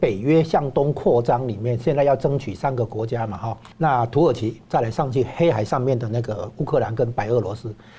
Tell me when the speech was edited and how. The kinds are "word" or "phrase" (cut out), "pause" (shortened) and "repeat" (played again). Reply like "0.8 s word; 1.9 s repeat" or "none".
3.7 s pause